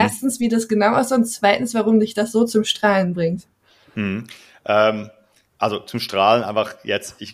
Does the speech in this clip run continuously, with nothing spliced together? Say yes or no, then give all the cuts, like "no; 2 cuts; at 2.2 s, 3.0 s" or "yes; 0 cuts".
yes; 0 cuts